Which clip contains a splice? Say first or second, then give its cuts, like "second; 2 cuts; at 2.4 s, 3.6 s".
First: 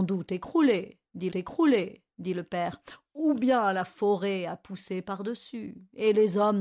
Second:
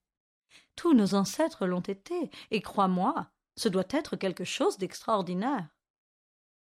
first; 1 cut; at 1.3 s